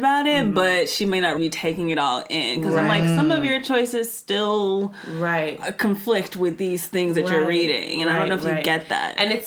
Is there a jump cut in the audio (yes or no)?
yes